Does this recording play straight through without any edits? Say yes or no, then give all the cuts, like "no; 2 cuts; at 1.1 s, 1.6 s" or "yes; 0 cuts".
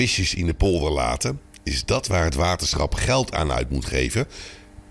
yes; 0 cuts